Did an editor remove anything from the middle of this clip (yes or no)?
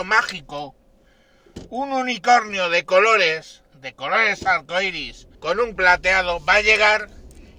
yes